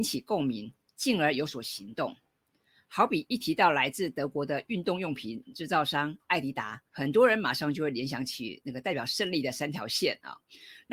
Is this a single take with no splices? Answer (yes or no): no